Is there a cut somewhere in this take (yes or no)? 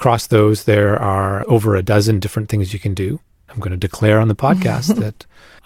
no